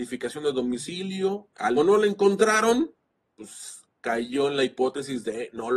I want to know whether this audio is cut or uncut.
cut